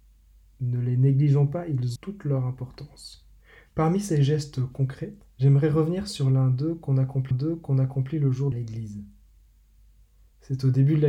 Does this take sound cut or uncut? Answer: cut